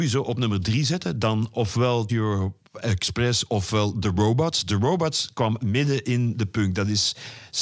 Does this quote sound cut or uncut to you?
cut